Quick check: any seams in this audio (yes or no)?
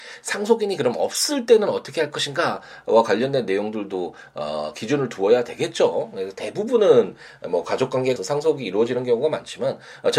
yes